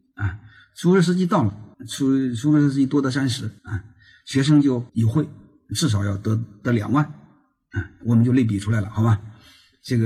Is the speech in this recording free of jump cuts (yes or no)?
no